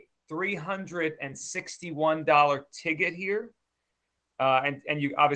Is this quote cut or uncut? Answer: uncut